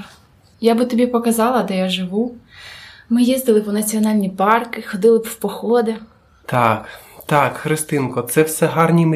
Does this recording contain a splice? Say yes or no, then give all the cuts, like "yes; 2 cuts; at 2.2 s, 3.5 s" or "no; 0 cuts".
no; 0 cuts